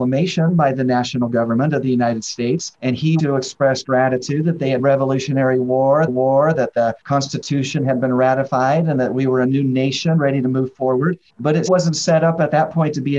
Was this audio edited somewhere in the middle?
yes; 7 cuts; at 2.7 s, 3.2 s, 4.8 s, 6.1 s, 7.0 s, 11.3 s, 11.7 s

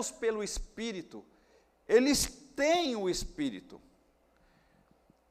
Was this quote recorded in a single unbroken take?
yes; 0 cuts

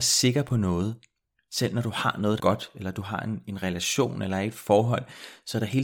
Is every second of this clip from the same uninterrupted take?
no; 2 cuts; at 1.4 s, 2.4 s

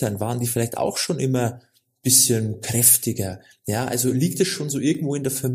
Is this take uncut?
yes; 0 cuts

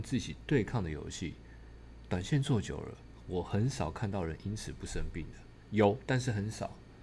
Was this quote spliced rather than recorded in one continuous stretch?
no; 0 cuts

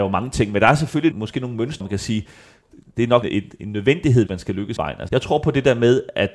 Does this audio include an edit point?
yes; 6 cuts; at 1.1 s, 1.8 s, 3.2 s, 4.3 s, 4.8 s, 5.1 s

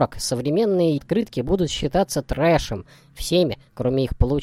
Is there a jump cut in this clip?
yes; 1 cut; at 1.0 s

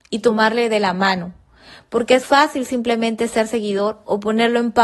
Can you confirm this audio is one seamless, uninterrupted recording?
no; 1 cut; at 2.2 s

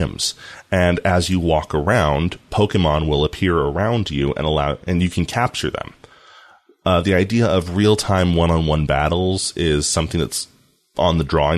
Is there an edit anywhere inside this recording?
no; 0 cuts

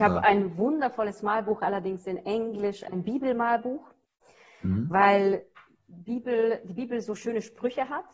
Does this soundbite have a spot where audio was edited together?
no; 0 cuts

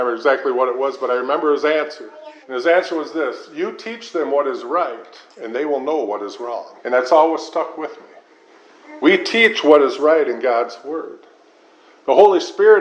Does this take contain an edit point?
yes; 3 cuts; at 2.4 s, 5.3 s, 6.8 s

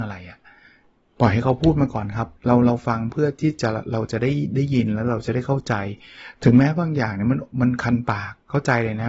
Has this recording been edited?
yes; 1 cut; at 2.4 s

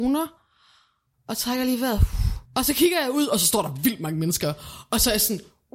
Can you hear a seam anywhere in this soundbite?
yes; 1 cut; at 2.5 s

